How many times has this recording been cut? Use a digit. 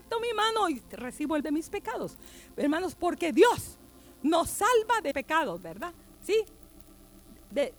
2